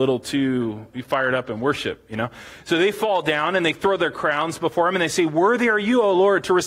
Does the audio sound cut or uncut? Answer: uncut